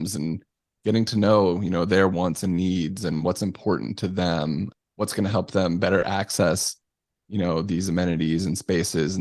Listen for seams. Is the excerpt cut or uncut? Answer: uncut